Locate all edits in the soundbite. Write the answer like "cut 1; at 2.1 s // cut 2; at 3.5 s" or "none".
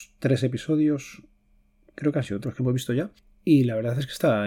cut 1; at 2.4 s